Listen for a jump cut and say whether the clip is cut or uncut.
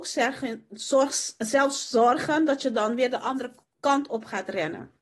uncut